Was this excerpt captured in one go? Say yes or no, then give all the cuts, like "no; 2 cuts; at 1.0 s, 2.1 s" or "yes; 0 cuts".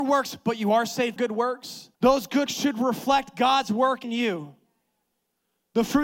no; 4 cuts; at 1.2 s, 1.9 s, 2.5 s, 4.0 s